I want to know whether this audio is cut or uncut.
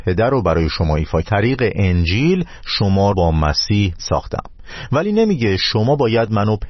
cut